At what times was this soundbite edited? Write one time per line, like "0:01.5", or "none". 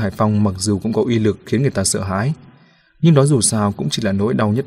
none